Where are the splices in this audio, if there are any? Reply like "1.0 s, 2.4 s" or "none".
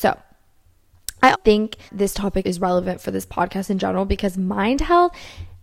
1.3 s, 1.9 s, 2.4 s